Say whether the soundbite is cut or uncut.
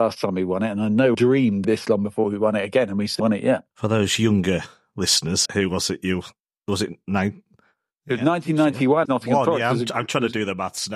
cut